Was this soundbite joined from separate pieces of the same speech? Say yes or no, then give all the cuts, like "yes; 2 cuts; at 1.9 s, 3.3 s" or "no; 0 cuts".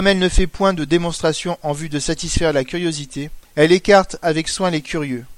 yes; 1 cut; at 3.4 s